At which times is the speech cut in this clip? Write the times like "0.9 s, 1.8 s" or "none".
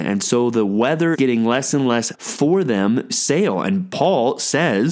1.1 s, 2.1 s, 3.1 s